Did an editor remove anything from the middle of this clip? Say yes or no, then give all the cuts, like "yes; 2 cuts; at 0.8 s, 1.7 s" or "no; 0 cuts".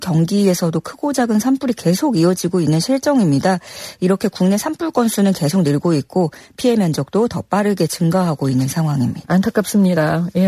no; 0 cuts